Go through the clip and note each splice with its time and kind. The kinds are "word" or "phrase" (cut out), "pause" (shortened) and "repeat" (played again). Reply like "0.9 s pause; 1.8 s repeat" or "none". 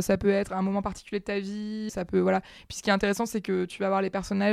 1.9 s word